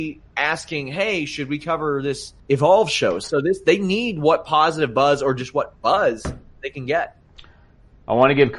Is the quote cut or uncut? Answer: cut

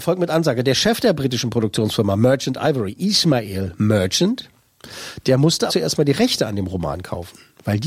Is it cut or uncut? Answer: cut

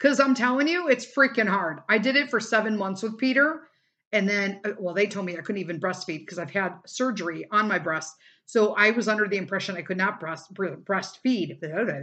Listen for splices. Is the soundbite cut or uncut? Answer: uncut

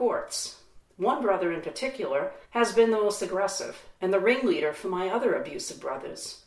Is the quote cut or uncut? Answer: cut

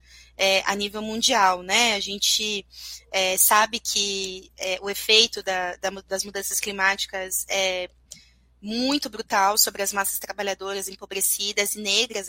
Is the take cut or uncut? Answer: uncut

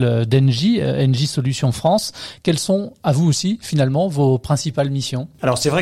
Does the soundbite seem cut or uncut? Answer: uncut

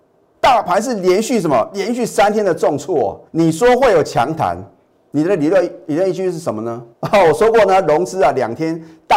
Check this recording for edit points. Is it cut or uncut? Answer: cut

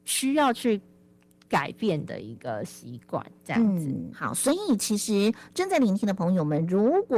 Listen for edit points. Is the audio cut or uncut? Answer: cut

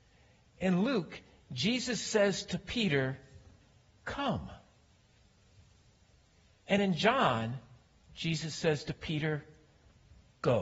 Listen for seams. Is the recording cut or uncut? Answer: uncut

